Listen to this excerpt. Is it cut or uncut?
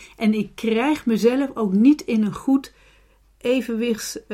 uncut